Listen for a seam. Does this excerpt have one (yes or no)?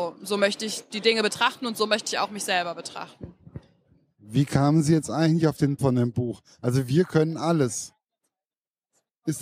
yes